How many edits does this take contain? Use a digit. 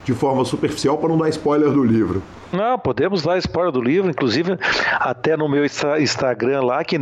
0